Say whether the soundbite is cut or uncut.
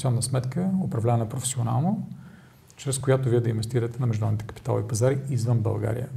uncut